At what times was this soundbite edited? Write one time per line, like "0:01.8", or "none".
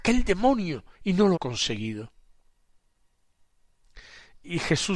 0:00.9
0:01.3